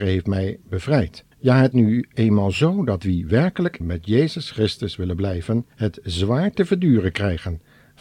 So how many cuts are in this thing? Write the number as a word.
four